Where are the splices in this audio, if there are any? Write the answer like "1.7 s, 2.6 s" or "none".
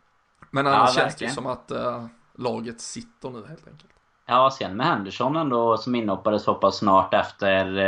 none